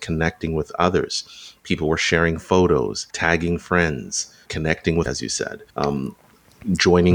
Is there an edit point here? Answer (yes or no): yes